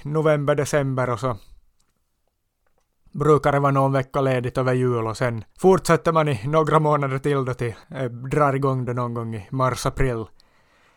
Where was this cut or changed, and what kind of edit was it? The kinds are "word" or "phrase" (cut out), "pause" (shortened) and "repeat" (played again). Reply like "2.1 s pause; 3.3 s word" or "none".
5.5 s pause; 7.8 s pause